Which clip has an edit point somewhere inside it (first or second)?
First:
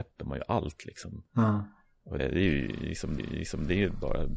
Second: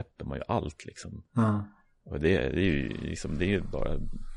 first